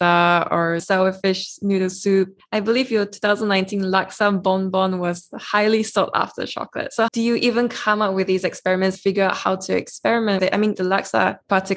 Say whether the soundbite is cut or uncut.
cut